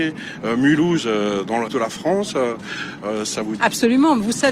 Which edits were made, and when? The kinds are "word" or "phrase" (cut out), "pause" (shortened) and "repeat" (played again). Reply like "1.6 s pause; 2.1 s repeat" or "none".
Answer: 1.7 s word; 3.6 s word